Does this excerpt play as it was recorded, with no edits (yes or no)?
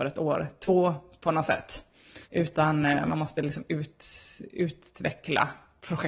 no